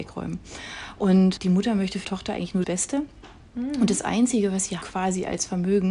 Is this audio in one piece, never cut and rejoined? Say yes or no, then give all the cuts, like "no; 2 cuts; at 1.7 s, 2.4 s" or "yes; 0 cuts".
no; 3 cuts; at 2.0 s, 2.6 s, 4.8 s